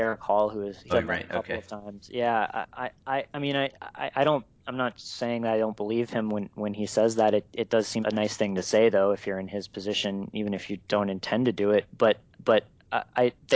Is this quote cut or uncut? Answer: cut